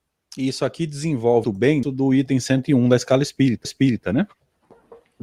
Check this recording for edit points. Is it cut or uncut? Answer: cut